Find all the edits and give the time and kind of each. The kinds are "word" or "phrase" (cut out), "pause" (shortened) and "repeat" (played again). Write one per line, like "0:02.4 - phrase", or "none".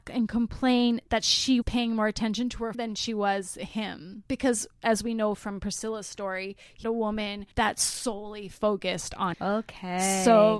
0:01.6 - word
0:02.7 - word
0:04.3 - pause
0:06.8 - word
0:07.5 - pause
0:09.3 - word